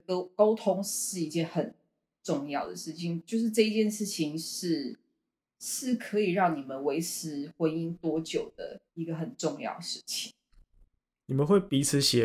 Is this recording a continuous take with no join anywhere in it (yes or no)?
no